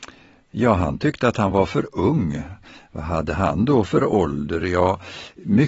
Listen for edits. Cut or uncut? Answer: uncut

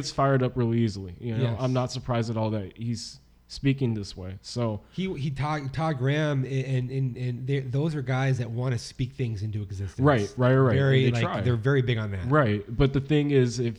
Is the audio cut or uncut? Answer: uncut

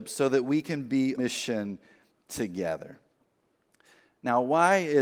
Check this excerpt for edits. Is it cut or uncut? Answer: cut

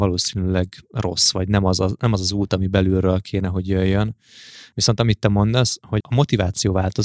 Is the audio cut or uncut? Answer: cut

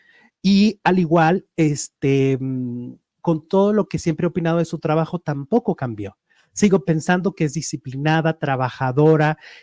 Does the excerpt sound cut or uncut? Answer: uncut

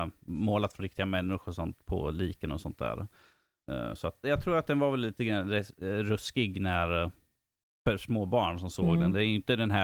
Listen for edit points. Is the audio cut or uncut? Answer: cut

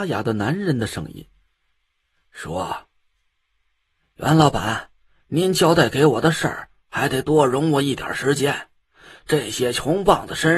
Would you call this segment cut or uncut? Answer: uncut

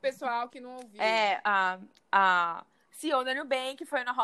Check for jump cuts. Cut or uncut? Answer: uncut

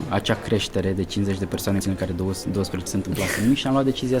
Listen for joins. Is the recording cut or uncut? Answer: cut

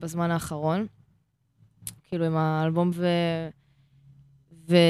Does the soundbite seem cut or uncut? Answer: cut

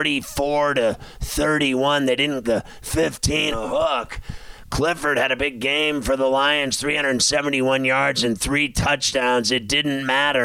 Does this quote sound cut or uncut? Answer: cut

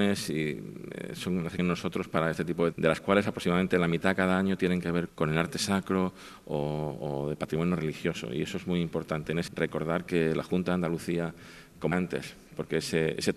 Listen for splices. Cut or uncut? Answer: cut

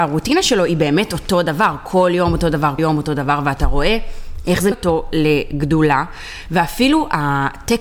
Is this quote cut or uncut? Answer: cut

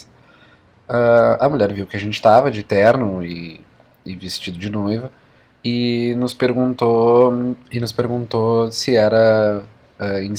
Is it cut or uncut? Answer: cut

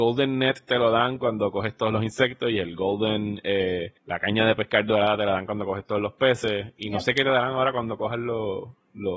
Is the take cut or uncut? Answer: cut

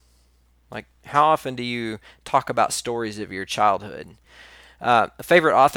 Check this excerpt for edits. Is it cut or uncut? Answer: uncut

